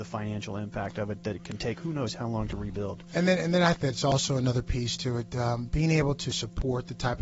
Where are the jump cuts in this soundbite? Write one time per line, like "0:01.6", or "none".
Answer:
0:03.7